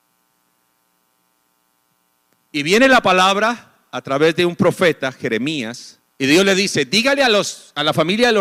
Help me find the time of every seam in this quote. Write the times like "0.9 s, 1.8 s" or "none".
6.1 s